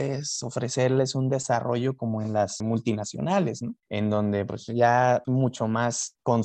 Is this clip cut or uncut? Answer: cut